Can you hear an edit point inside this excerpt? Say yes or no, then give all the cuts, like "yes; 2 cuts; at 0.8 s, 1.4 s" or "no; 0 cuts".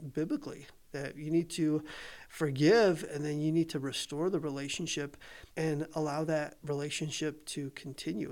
yes; 1 cut; at 5.5 s